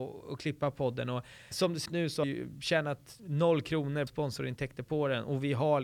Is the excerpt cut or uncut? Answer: cut